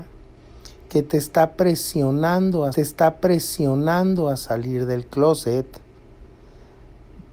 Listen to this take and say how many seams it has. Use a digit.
1